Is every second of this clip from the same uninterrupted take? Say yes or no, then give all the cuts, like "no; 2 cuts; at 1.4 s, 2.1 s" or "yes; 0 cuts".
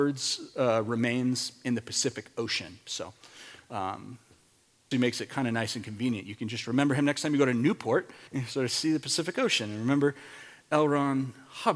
no; 2 cuts; at 4.9 s, 8.3 s